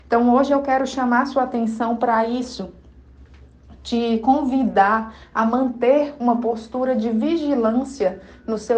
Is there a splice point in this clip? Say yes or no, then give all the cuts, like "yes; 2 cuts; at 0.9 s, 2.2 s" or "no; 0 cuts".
no; 0 cuts